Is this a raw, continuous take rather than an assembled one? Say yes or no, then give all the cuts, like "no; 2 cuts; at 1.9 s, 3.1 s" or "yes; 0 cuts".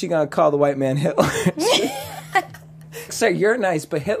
no; 1 cut; at 3.1 s